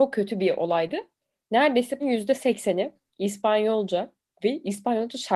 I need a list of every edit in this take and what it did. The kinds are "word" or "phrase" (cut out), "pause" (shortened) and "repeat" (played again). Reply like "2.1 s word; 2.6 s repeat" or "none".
2.0 s word